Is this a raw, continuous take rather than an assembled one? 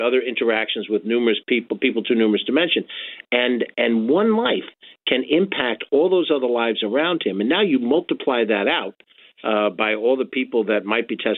yes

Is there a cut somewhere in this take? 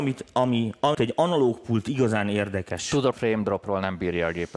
yes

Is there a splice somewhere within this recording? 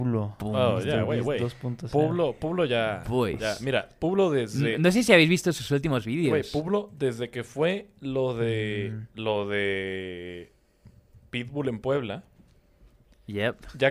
no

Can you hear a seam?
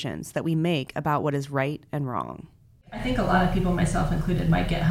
no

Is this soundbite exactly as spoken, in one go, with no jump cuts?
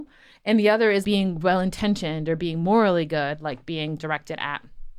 no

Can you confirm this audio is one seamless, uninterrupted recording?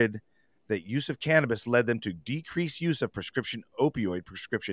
yes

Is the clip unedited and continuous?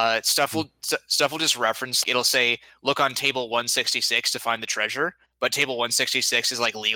no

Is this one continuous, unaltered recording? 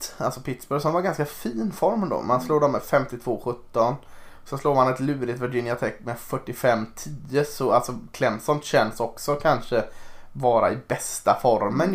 yes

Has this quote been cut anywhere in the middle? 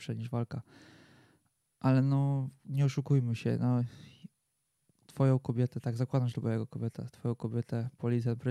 no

